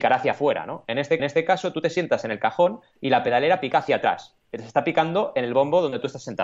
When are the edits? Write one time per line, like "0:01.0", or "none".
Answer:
0:01.2